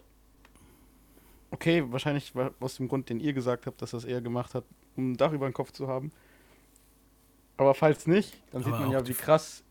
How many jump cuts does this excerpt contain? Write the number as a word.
zero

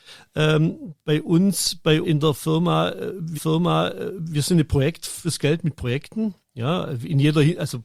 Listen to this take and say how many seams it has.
five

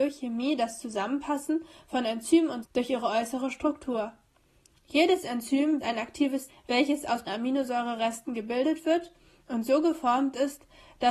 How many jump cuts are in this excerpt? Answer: four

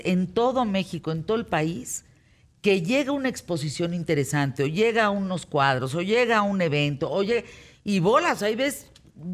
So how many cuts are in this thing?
zero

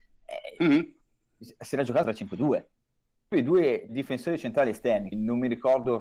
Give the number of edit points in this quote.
four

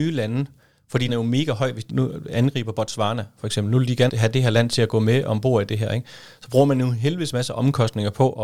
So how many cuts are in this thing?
three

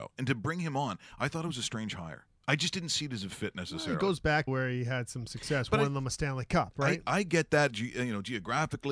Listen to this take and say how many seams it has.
two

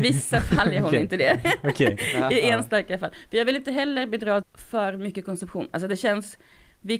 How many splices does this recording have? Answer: one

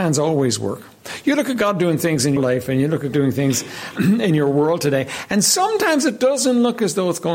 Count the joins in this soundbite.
three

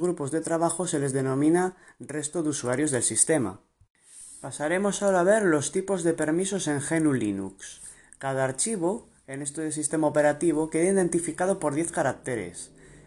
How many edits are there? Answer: zero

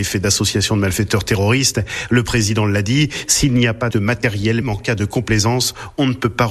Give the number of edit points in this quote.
two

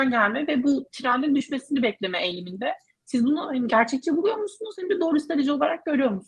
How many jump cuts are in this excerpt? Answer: zero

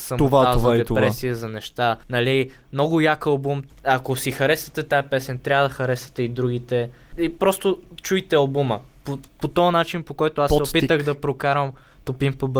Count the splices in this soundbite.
three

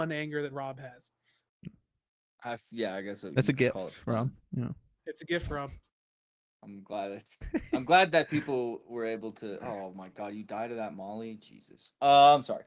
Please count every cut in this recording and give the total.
zero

